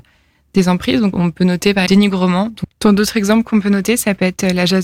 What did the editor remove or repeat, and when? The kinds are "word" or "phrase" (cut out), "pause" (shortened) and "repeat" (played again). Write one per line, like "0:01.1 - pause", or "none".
0:01.1 - word
0:01.9 - phrase
0:02.7 - pause